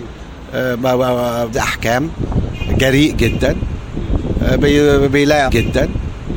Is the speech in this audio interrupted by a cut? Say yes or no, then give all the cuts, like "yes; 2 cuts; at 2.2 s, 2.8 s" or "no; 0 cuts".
yes; 2 cuts; at 1.5 s, 5.5 s